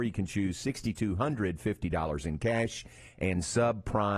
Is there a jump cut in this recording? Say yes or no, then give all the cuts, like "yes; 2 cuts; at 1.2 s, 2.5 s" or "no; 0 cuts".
no; 0 cuts